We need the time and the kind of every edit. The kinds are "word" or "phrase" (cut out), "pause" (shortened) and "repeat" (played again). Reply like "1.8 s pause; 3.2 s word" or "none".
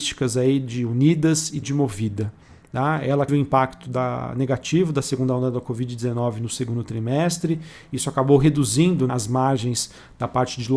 1.6 s word; 3.3 s phrase; 9.1 s word

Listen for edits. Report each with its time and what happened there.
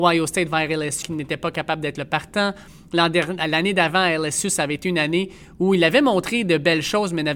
1.0 s word

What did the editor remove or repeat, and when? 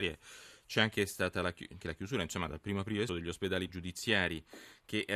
1.8 s phrase; 3.1 s word; 3.7 s word

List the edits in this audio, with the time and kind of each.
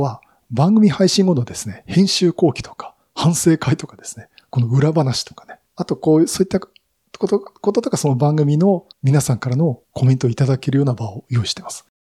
5.7 s pause; 8.9 s pause; 9.8 s pause

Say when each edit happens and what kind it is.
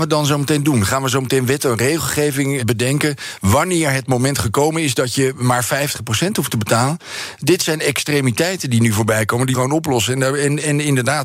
2.6 s word; 9.5 s phrase

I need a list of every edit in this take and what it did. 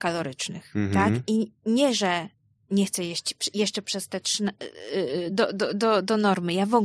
none

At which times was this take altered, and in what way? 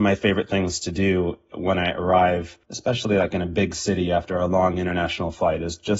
2.6 s pause

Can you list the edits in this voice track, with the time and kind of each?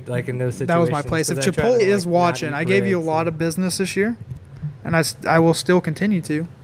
1.8 s word

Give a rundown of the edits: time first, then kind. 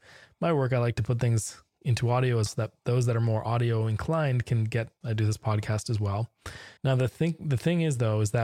2.5 s word; 5.0 s phrase; 6.8 s pause

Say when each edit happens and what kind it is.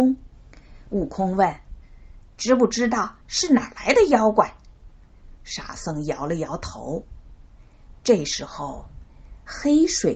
3.2 s pause

